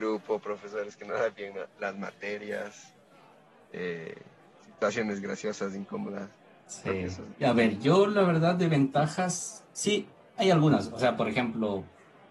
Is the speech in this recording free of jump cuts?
yes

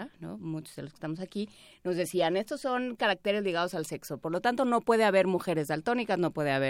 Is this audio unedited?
yes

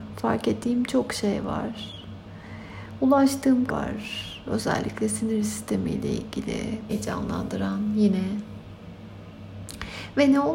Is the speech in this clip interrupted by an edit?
yes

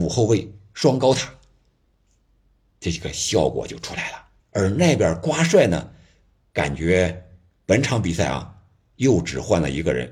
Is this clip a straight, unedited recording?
no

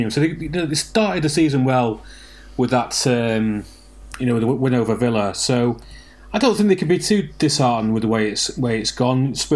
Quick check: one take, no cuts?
yes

